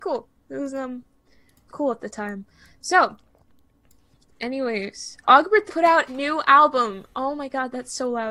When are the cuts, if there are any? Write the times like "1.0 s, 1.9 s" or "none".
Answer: 1.7 s, 5.2 s, 5.7 s, 6.1 s